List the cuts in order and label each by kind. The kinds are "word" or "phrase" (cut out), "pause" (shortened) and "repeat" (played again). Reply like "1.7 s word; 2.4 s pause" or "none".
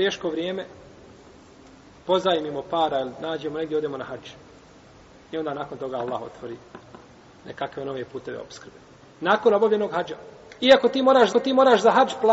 11.3 s repeat